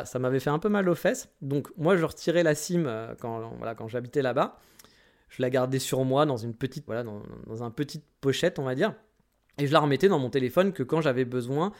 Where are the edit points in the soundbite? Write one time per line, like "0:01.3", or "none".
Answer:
0:06.9